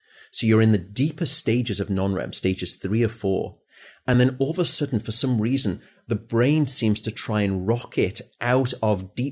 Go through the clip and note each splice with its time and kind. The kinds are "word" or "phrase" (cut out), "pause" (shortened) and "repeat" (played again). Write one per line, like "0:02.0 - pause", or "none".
none